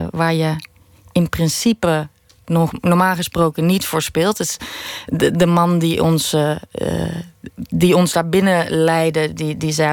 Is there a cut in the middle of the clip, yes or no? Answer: no